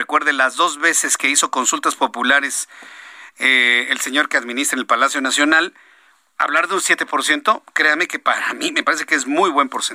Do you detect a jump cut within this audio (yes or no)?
no